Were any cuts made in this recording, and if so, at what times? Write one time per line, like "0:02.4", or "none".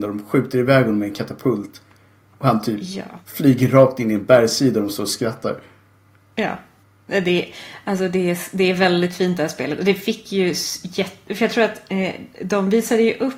none